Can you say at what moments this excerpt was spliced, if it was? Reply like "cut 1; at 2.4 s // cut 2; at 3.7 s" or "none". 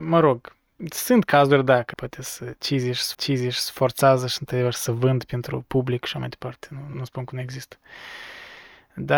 cut 1; at 1.9 s // cut 2; at 3.1 s // cut 3; at 6.9 s